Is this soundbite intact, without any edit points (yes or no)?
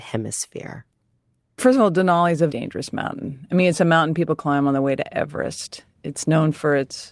no